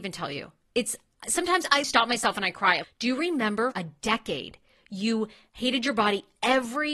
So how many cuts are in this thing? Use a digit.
3